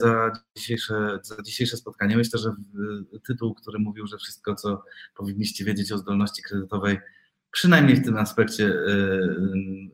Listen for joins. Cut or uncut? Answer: uncut